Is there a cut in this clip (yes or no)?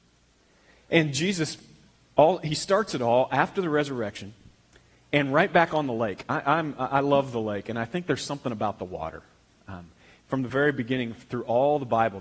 no